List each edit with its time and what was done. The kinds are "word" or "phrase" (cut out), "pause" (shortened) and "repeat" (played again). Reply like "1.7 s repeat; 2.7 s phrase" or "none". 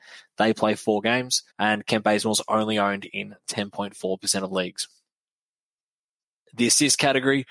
1.5 s pause